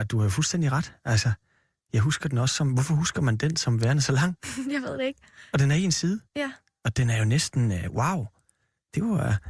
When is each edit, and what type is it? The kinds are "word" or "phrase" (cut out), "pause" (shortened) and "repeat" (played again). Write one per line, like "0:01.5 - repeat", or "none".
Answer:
none